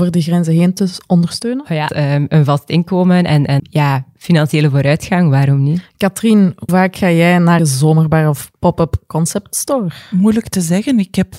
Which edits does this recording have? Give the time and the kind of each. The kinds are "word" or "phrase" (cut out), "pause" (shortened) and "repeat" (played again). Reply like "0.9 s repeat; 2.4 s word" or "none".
1.9 s phrase; 3.6 s word; 6.7 s word; 7.6 s phrase; 8.5 s pause